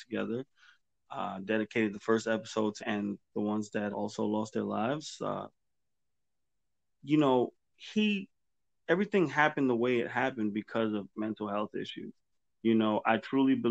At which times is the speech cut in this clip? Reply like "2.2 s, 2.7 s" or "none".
2.8 s, 3.2 s, 3.9 s, 11.1 s